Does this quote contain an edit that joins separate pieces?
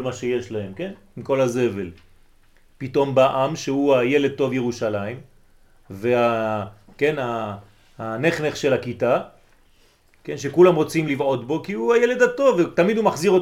no; 0 cuts

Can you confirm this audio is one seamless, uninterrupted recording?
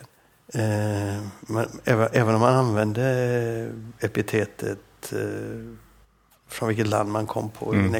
yes; 0 cuts

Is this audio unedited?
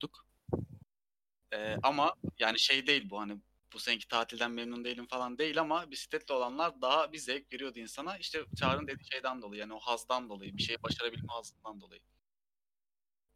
yes; 0 cuts

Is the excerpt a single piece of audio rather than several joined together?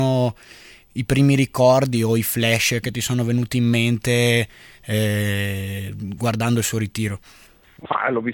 yes; 0 cuts

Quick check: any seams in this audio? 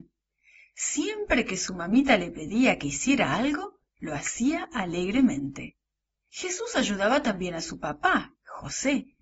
no; 0 cuts

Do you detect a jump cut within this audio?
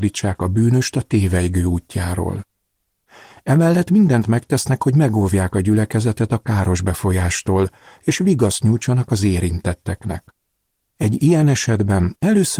no; 0 cuts

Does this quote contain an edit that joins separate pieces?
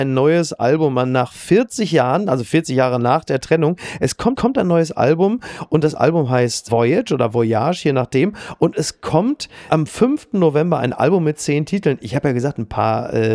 yes; 1 cut; at 4.4 s

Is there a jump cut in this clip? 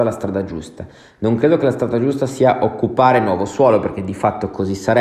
no; 0 cuts

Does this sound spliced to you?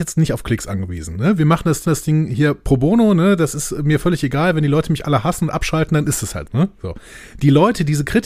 yes; 2 cuts; at 1.8 s, 6.5 s

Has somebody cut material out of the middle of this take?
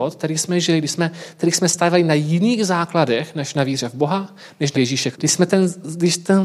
yes; 2 cuts; at 4.7 s, 5.1 s

